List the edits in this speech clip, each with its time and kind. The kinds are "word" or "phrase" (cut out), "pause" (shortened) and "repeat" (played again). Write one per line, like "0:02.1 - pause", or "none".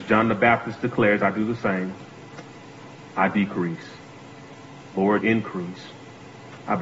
0:05.2 - word